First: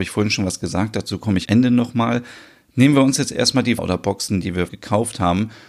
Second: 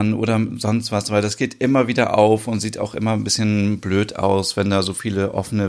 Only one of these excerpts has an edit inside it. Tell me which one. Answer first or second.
first